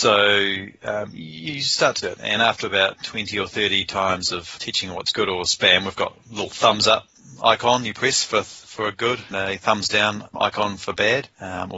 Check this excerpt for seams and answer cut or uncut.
cut